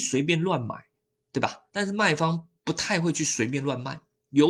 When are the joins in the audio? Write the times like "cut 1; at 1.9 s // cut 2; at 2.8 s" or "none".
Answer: cut 1; at 1.7 s // cut 2; at 2.6 s